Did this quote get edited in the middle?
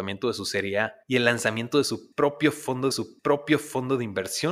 yes; 2 cuts; at 1.0 s, 2.9 s

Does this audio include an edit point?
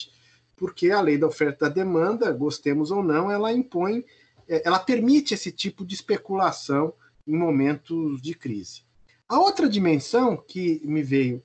no; 0 cuts

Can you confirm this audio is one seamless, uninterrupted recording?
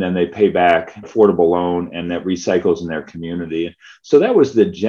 no; 1 cut; at 1.0 s

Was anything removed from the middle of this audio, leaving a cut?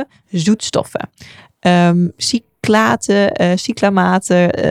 no; 0 cuts

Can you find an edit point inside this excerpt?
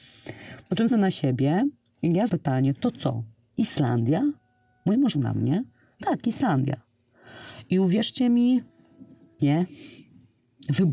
yes; 5 cuts; at 0.9 s, 2.3 s, 5.1 s, 6.0 s, 9.4 s

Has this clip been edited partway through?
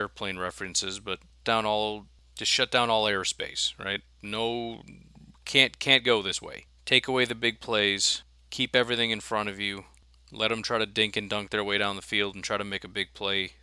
yes; 1 cut; at 1.4 s

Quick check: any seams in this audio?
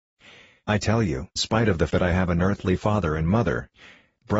yes; 2 cuts; at 1.4 s, 1.9 s

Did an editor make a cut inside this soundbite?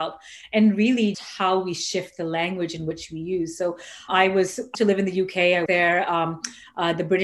yes; 4 cuts; at 1.1 s, 4.1 s, 4.7 s, 5.7 s

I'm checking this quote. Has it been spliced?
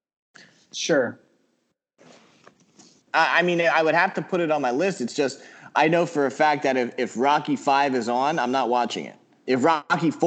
no; 0 cuts

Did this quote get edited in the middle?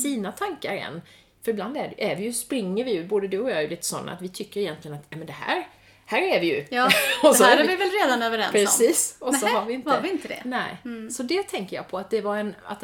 no; 0 cuts

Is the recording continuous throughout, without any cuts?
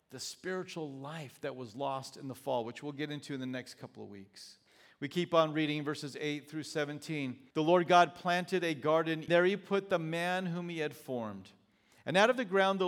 no; 3 cuts; at 4.7 s, 7.5 s, 9.3 s

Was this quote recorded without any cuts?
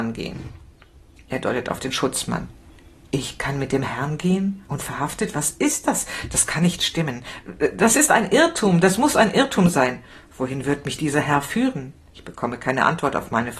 yes; 0 cuts

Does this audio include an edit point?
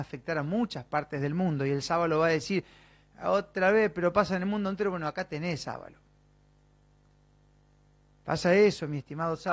no; 0 cuts

